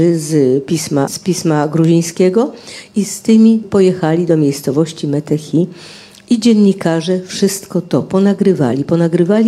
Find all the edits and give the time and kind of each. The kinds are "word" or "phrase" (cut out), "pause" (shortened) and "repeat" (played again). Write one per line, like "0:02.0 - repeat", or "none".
0:01.1 - word
0:03.6 - word